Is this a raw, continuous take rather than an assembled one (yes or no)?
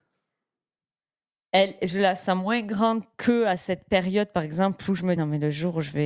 no